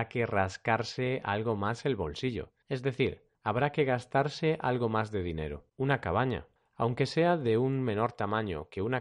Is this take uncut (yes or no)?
no